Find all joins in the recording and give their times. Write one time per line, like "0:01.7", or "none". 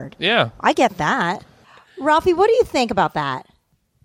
none